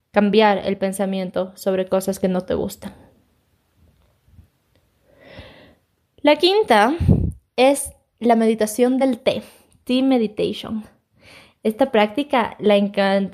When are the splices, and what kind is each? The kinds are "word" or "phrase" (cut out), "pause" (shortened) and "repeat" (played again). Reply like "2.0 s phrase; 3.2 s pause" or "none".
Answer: none